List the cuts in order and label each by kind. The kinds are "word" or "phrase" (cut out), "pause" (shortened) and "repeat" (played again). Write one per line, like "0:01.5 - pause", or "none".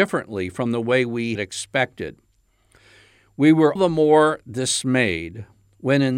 0:01.4 - word
0:03.8 - word